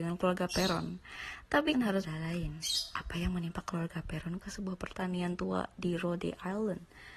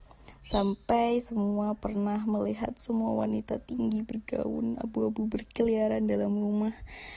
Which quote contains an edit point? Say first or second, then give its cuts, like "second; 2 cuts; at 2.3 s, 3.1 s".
first; 3 cuts; at 1.7 s, 2.0 s, 4.4 s